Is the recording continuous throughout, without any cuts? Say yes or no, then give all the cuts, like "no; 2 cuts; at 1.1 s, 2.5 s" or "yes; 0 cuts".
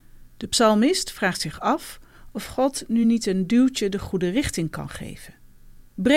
yes; 0 cuts